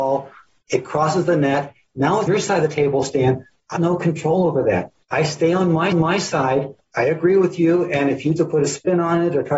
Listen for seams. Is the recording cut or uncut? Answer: cut